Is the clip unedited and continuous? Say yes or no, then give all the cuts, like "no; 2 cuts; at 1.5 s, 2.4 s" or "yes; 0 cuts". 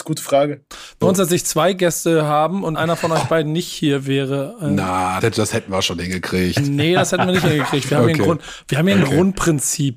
no; 3 cuts; at 1.0 s, 2.7 s, 5.2 s